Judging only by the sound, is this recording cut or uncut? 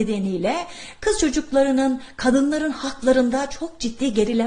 uncut